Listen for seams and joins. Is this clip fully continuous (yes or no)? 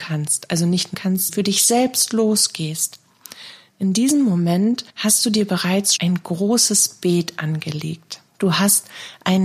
no